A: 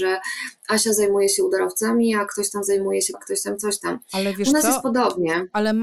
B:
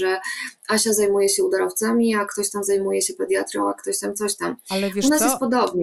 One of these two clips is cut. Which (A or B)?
A